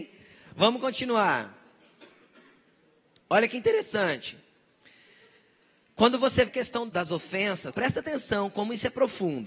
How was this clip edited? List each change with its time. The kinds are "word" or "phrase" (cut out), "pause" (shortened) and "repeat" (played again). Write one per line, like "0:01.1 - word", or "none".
0:06.5 - word
0:06.9 - word
0:07.7 - word